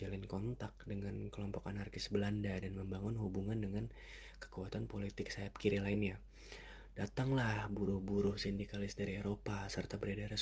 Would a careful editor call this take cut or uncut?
uncut